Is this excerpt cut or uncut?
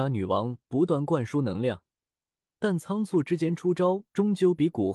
uncut